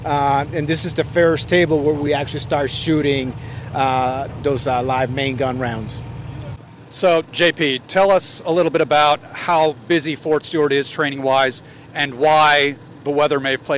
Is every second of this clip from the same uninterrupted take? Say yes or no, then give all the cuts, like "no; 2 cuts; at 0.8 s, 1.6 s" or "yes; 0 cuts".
yes; 0 cuts